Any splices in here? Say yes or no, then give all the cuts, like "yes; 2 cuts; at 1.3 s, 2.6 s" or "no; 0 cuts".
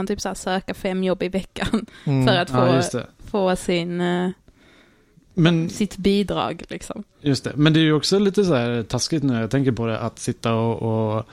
no; 0 cuts